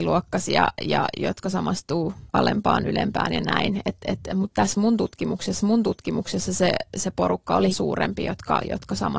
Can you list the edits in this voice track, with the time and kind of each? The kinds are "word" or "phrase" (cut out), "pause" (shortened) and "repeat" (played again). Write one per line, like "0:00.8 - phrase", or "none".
0:02.3 - pause
0:05.6 - repeat
0:07.7 - word